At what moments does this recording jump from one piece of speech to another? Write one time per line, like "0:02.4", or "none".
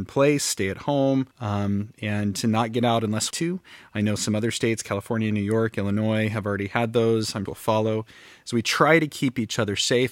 0:01.3
0:03.3
0:07.5

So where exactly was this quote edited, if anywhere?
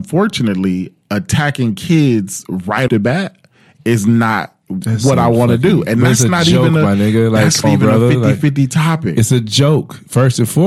0:02.9
0:07.6

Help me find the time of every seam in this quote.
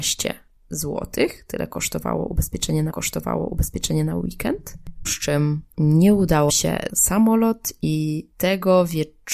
0:02.9
0:05.0
0:05.7
0:06.5
0:06.9
0:08.3

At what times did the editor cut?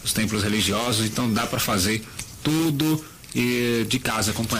none

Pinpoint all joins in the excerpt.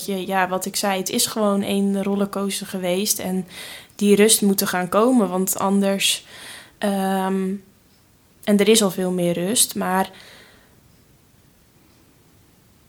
none

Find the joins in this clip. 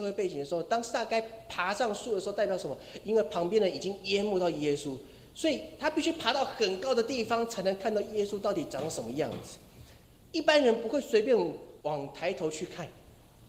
0:11.8

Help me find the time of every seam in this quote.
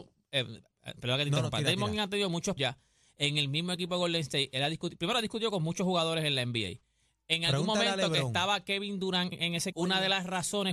0:02.6
0:09.3
0:09.7

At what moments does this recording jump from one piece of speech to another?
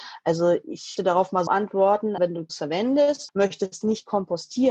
0:01.0
0:01.5
0:02.2
0:02.5
0:03.3
0:03.8

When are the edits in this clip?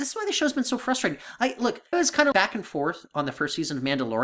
0:01.9
0:02.3

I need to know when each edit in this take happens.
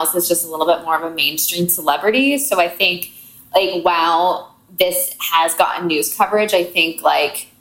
none

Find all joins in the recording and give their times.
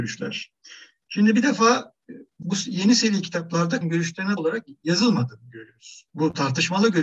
0:02.4
0:03.8
0:04.4
0:06.1

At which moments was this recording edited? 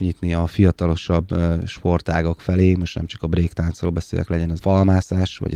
0:04.6

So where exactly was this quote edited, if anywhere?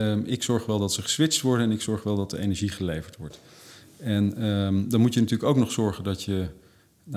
none

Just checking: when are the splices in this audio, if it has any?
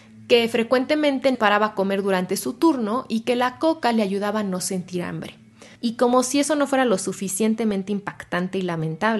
0:01.3
0:05.7

